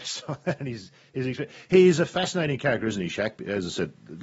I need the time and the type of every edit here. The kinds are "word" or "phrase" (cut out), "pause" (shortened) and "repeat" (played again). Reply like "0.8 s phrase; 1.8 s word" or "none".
none